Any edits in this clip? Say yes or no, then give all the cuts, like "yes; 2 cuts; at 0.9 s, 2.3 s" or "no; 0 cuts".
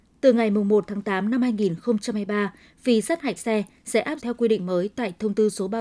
yes; 2 cuts; at 3.4 s, 4.2 s